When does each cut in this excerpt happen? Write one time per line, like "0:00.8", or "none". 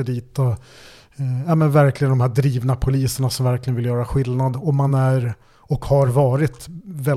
none